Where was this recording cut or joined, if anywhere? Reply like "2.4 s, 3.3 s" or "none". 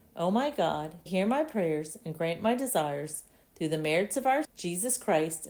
1.1 s, 4.4 s